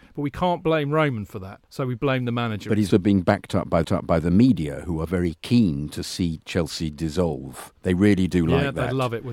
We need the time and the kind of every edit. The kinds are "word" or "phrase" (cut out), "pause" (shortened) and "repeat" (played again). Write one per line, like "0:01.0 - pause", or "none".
0:01.6 - pause
0:02.9 - word
0:03.8 - repeat
0:07.8 - pause